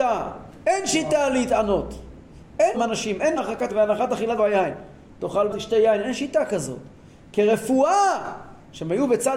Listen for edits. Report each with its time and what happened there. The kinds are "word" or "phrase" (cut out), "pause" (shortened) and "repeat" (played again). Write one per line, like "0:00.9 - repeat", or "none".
0:02.7 - phrase
0:03.4 - word
0:03.7 - word
0:04.4 - word
0:05.5 - word